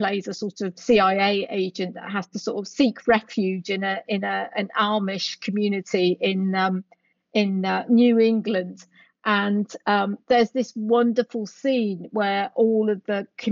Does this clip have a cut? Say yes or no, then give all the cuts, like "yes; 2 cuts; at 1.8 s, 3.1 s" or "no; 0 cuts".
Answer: no; 0 cuts